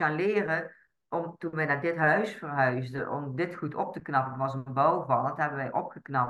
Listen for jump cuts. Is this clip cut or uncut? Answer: uncut